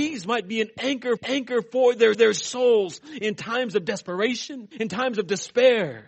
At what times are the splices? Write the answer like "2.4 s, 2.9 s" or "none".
1.2 s, 2.1 s, 4.7 s